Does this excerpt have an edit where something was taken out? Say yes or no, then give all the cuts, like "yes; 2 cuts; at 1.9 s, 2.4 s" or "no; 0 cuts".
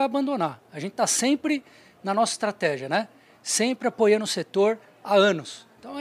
no; 0 cuts